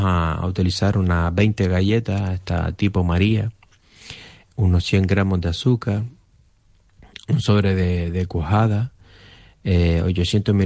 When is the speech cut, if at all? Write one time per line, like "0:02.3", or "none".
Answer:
none